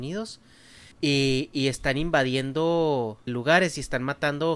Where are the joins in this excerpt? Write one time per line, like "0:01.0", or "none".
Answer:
0:00.9
0:03.3